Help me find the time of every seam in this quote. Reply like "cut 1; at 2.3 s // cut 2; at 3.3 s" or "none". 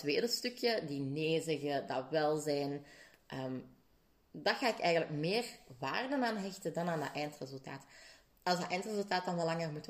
cut 1; at 4.1 s // cut 2; at 8.3 s